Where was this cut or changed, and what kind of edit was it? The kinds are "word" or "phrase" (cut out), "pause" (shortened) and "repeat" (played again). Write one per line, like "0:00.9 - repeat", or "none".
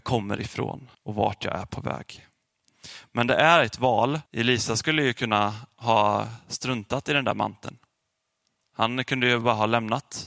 0:00.9 - pause
0:04.3 - pause